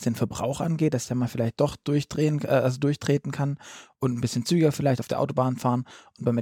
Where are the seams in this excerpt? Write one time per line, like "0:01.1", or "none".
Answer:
none